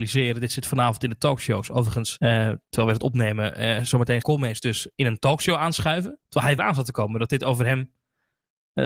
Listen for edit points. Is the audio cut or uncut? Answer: cut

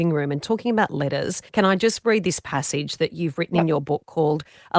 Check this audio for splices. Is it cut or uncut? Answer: cut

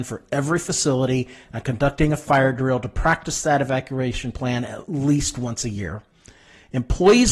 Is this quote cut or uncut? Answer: uncut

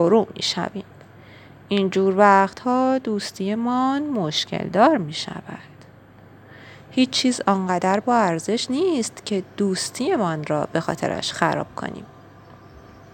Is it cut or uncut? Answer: uncut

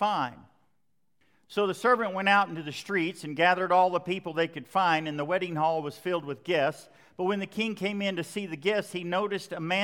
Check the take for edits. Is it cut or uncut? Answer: uncut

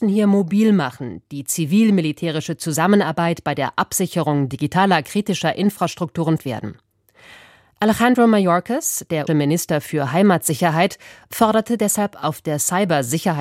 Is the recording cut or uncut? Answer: cut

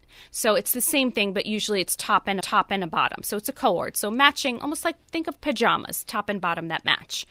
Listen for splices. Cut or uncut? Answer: cut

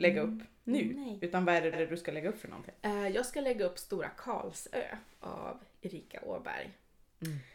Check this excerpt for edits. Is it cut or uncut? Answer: cut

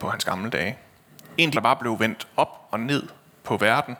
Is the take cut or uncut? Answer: cut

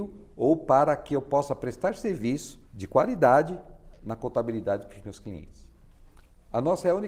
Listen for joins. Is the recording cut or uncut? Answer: cut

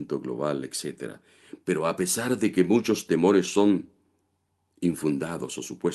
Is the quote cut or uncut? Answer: uncut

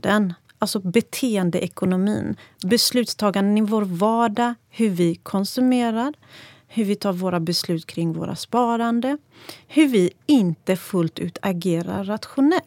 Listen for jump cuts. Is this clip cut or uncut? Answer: uncut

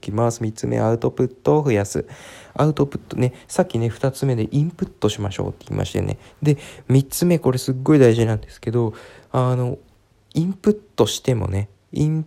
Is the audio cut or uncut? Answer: uncut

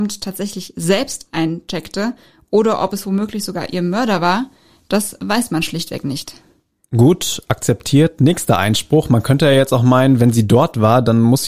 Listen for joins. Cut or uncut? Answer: uncut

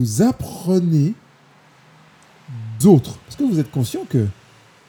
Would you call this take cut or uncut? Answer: cut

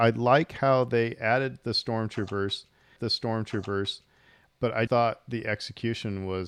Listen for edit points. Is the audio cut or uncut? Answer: cut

